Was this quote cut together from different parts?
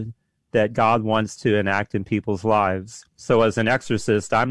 yes; 1 cut; at 3.1 s

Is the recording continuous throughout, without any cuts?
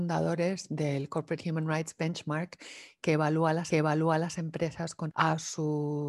no; 2 cuts; at 3.7 s, 5.1 s

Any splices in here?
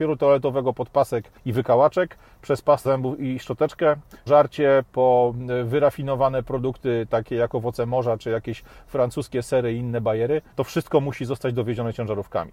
yes; 4 cuts; at 1.4 s, 2.9 s, 4.3 s, 10.5 s

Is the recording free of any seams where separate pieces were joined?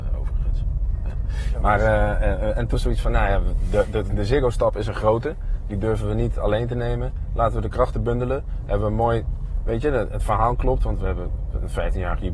no; 2 cuts; at 2.7 s, 4.1 s

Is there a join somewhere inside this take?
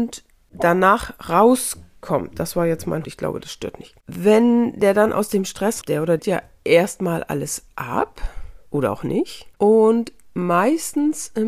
yes; 6 cuts; at 3.0 s, 4.0 s, 5.8 s, 6.2 s, 8.7 s, 9.5 s

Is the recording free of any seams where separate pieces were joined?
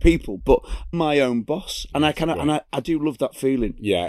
no; 2 cuts; at 0.9 s, 2.7 s

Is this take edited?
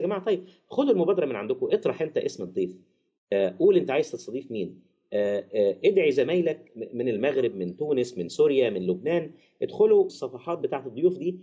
yes; 1 cut; at 10.1 s

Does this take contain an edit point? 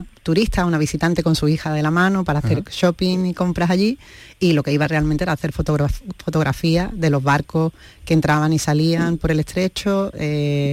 no; 0 cuts

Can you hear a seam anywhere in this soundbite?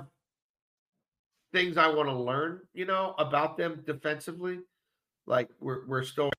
no; 0 cuts

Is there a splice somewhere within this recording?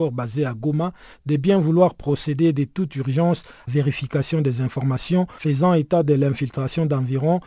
yes; 1 cut; at 3.7 s

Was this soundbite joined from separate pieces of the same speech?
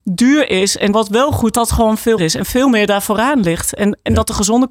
yes; 3 cuts; at 0.9 s, 1.5 s, 2.2 s

